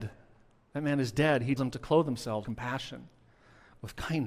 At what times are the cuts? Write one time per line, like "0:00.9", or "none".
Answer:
0:01.6
0:02.4

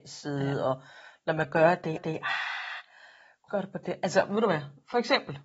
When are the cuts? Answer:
0:02.0
0:03.5

